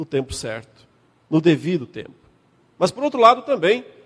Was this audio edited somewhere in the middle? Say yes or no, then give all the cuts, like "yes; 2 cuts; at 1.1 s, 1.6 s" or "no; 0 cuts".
no; 0 cuts